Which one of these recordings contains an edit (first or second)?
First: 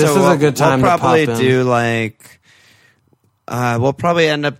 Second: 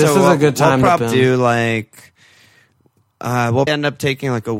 second